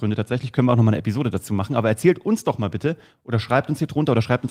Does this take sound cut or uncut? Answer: uncut